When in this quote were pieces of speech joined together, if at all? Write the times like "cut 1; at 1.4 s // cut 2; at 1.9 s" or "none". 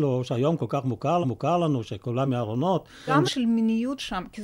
cut 1; at 1.2 s // cut 2; at 2.2 s // cut 3; at 3.2 s